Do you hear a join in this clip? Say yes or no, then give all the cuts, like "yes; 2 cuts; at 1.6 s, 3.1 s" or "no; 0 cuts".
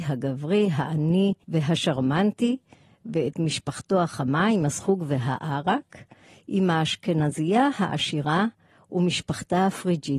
no; 0 cuts